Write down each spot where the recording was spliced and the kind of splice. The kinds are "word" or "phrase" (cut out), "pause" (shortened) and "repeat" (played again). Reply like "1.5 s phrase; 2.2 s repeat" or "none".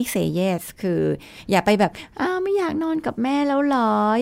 none

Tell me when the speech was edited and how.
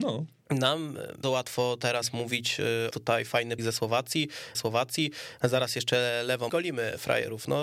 1.2 s word; 2.9 s phrase; 3.6 s word; 4.5 s repeat; 6.5 s phrase

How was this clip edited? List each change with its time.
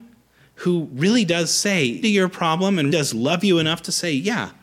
2.0 s word; 2.9 s word

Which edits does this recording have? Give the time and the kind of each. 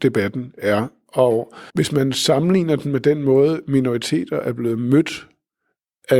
1.7 s pause

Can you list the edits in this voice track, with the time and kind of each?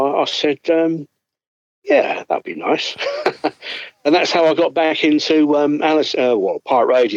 none

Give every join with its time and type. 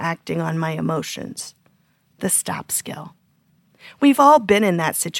none

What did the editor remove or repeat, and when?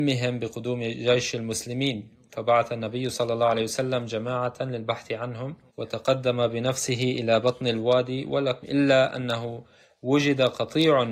5.7 s pause; 8.6 s phrase

